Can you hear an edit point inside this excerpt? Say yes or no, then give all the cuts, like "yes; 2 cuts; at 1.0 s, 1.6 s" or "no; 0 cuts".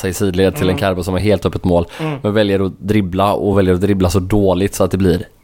no; 0 cuts